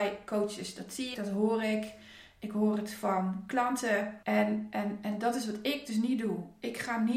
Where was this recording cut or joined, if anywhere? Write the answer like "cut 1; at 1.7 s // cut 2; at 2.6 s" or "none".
cut 1; at 1.1 s // cut 2; at 4.2 s